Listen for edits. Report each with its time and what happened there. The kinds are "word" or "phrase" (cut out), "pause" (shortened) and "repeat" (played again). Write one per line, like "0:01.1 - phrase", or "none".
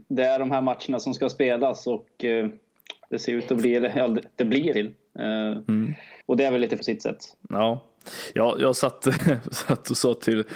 0:04.7 - word
0:06.2 - pause
0:06.8 - word